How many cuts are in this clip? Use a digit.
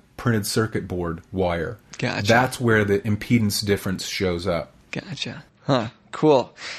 1